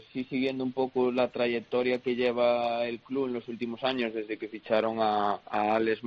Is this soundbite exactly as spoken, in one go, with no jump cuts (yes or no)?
yes